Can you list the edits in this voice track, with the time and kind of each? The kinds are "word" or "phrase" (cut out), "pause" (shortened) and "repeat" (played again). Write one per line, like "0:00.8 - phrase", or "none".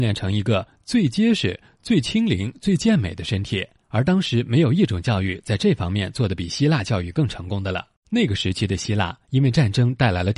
0:03.8 - pause
0:08.0 - pause